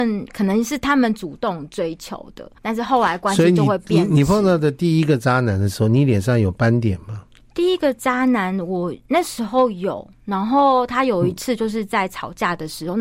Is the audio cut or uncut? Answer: cut